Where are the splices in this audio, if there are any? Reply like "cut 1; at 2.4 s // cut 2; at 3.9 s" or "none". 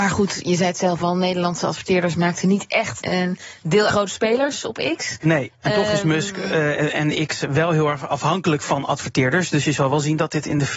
cut 1; at 3.0 s // cut 2; at 3.9 s

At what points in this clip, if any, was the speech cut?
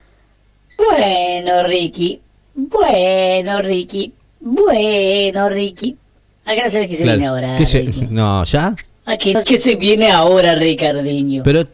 cut 1; at 9.4 s

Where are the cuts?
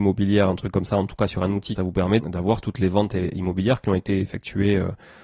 cut 1; at 1.8 s // cut 2; at 2.2 s

